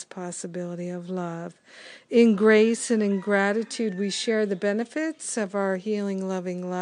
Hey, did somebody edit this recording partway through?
no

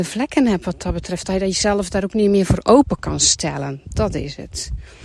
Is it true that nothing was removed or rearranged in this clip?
yes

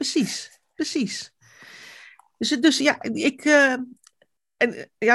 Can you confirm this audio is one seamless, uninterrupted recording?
yes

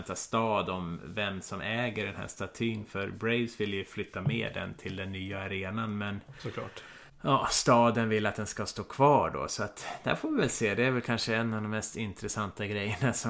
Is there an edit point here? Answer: yes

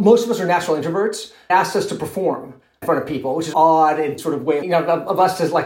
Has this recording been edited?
yes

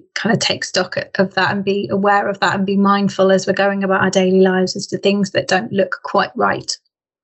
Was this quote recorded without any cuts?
yes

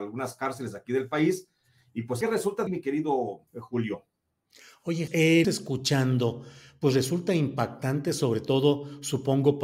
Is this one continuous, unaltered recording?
no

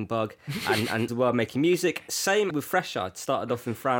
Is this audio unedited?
no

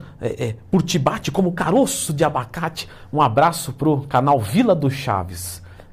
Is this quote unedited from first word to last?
yes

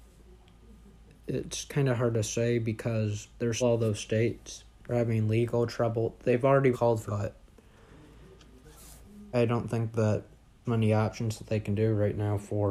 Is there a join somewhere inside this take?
yes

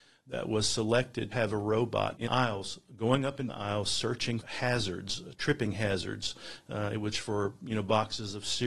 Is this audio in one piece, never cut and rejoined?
no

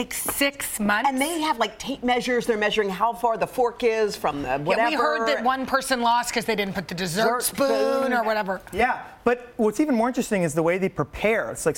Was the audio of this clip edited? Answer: no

